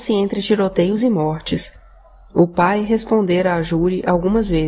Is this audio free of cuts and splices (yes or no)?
yes